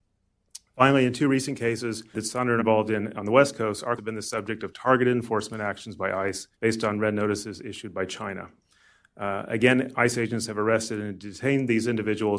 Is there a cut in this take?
yes; 4 cuts; at 2.1 s, 2.6 s, 4.0 s, 6.5 s

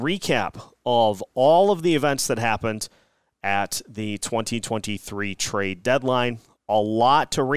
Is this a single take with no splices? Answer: yes; 0 cuts

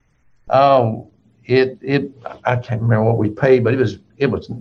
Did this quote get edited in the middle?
no; 0 cuts

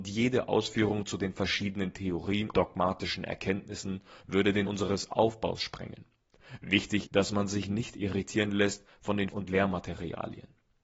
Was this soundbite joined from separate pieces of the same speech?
yes; 4 cuts; at 2.5 s, 4.6 s, 7.0 s, 9.3 s

